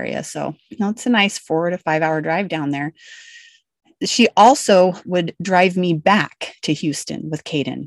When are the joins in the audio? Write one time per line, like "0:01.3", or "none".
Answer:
none